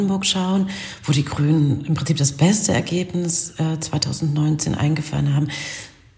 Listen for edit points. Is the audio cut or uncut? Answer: uncut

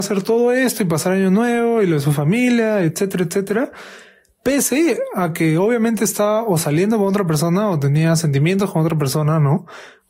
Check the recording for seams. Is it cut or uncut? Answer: uncut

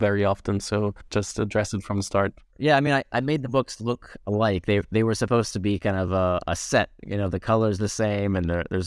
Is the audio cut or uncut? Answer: uncut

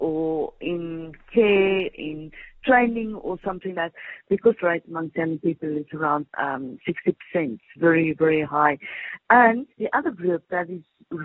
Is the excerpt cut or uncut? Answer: cut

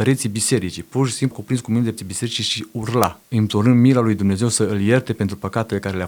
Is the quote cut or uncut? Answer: cut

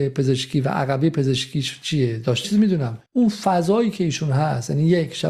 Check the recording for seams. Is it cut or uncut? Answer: cut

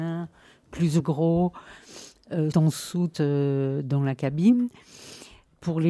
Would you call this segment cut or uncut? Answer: cut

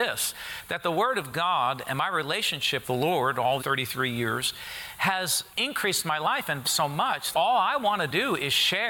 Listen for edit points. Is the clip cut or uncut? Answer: cut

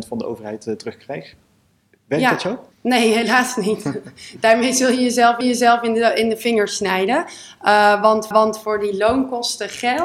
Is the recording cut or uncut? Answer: cut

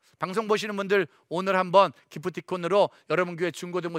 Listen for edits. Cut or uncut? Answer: uncut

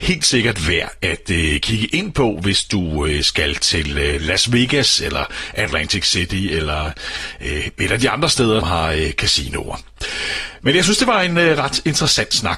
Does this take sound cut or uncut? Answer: cut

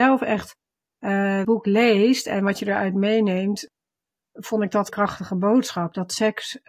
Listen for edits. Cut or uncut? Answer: cut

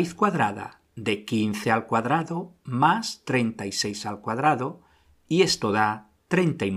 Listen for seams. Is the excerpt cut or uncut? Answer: uncut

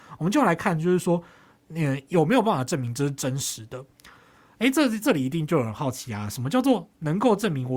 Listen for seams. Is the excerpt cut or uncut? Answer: uncut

